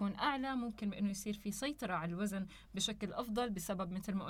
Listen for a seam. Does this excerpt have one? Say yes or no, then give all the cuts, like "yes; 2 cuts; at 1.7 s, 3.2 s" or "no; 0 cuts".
no; 0 cuts